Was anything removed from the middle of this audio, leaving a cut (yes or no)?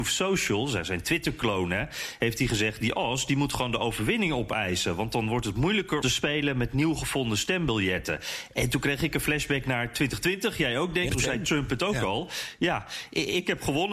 yes